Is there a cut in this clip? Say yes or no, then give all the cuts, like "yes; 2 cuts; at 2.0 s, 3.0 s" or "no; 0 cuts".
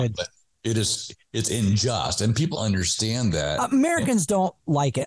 yes; 1 cut; at 2.5 s